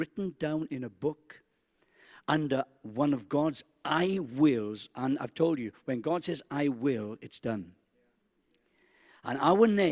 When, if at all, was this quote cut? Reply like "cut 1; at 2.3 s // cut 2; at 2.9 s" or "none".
none